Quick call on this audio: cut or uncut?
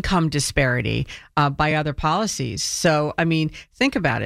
uncut